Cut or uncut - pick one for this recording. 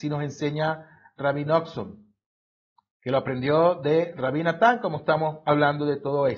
uncut